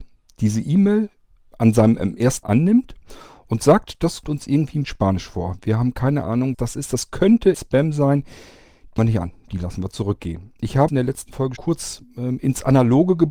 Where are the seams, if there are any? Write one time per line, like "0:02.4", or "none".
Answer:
0:02.4
0:04.2
0:04.8
0:06.5
0:07.5
0:09.0
0:10.9
0:11.6